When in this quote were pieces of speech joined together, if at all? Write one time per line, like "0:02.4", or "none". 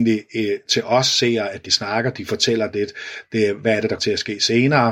0:01.7
0:04.0